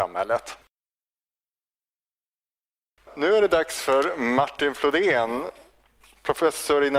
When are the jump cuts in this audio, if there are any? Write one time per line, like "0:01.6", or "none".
none